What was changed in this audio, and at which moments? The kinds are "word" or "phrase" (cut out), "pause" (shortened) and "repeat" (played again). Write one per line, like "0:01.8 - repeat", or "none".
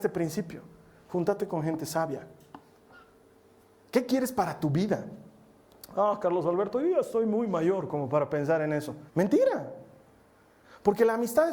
0:09.1 - pause